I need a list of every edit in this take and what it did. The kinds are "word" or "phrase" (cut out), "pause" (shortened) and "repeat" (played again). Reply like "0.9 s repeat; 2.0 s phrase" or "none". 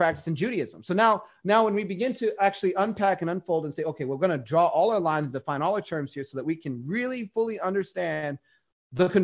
none